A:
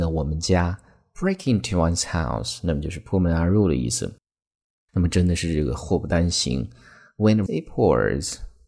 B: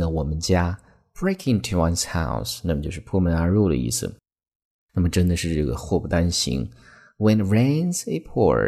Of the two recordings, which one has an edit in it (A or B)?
A